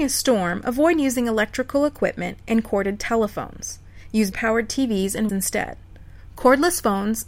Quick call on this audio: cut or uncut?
cut